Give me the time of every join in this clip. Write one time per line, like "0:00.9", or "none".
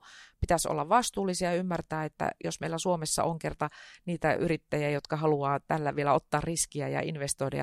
none